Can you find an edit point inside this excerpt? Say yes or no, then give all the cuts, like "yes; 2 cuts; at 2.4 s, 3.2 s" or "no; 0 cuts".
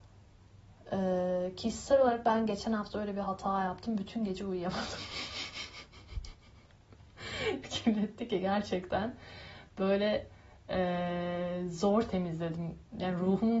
yes; 1 cut; at 7.6 s